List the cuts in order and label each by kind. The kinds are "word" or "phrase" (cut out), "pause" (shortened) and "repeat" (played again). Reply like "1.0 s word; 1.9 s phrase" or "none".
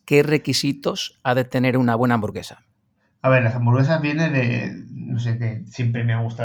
none